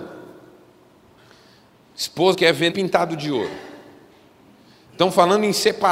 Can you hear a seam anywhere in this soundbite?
yes; 2 cuts; at 2.3 s, 2.7 s

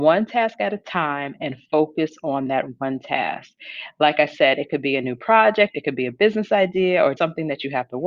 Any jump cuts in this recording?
yes; 1 cut; at 7.2 s

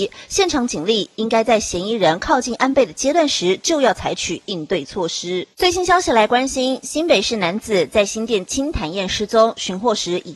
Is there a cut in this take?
yes; 1 cut; at 5.5 s

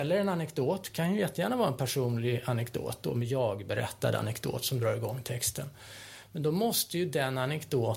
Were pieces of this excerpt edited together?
no; 0 cuts

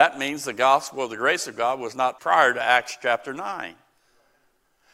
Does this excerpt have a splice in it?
yes; 1 cut; at 2.2 s

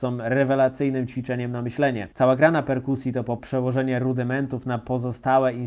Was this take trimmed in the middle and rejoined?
yes; 2 cuts; at 2.1 s, 3.4 s

